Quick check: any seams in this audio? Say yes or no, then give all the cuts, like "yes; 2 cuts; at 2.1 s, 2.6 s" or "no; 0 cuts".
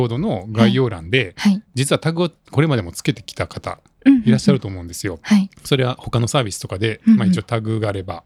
yes; 1 cut; at 5.6 s